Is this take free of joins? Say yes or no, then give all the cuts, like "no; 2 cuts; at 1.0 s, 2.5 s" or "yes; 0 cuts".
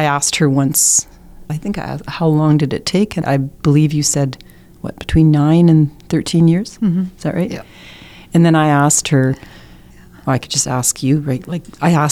no; 2 cuts; at 1.5 s, 3.2 s